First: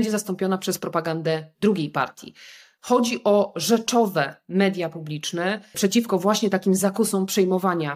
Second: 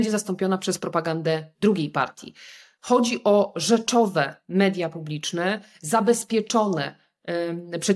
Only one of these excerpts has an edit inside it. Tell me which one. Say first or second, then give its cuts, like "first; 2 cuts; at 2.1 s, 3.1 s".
first; 1 cut; at 5.7 s